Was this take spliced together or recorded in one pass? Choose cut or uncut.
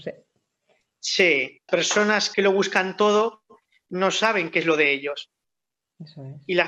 cut